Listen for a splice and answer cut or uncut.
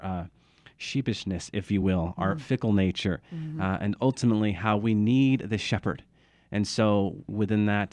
uncut